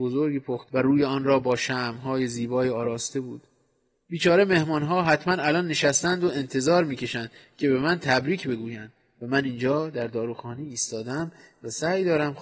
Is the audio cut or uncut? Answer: uncut